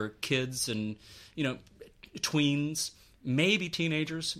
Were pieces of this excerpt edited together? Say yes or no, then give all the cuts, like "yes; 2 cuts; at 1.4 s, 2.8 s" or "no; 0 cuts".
no; 0 cuts